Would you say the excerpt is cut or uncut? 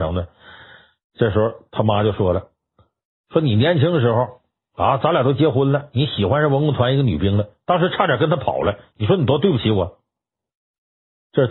uncut